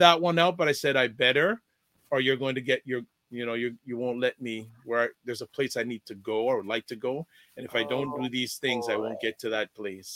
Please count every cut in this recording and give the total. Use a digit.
0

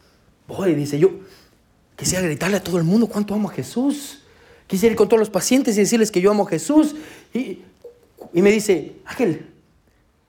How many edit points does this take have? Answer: 0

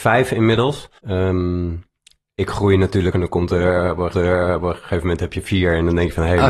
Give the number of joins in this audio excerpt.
3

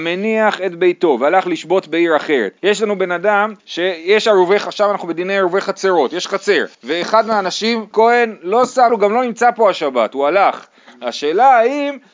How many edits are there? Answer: 5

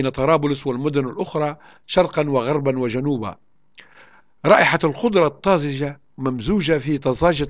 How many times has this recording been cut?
0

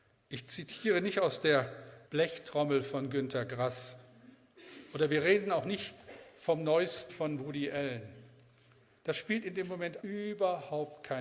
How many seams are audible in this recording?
3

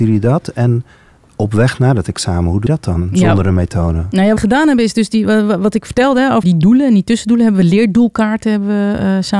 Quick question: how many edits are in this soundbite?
3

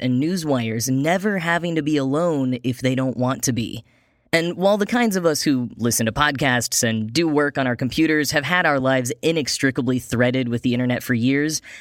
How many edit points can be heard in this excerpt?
0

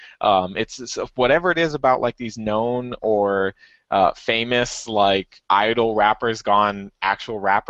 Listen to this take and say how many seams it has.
0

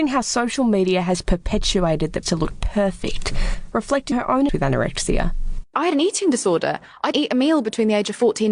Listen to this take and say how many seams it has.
4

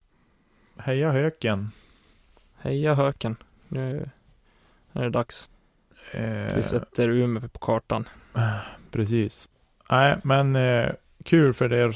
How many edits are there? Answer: 0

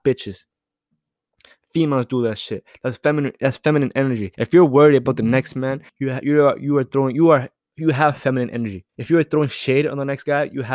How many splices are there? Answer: 3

